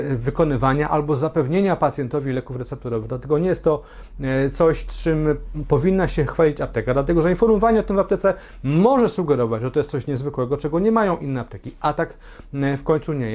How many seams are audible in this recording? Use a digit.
0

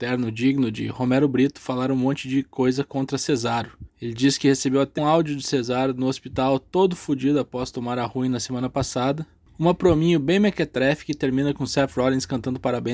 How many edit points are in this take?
2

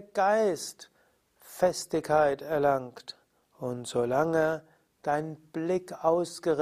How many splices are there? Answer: 0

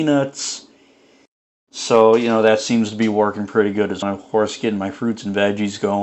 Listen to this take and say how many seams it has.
1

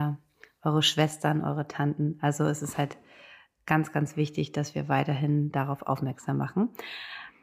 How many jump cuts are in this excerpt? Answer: 0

